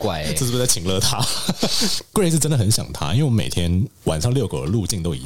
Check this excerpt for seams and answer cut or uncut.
cut